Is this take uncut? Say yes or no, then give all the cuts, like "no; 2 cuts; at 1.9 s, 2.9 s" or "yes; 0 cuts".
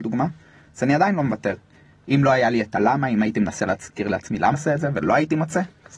no; 1 cut; at 4.5 s